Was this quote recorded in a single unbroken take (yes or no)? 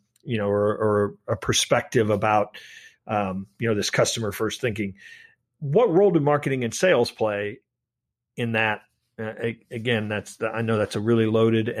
yes